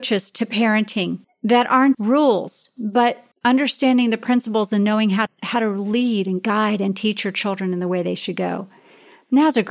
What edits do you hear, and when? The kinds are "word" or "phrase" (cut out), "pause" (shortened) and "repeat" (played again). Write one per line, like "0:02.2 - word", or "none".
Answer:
0:01.2 - pause
0:01.9 - word
0:03.3 - pause
0:05.3 - word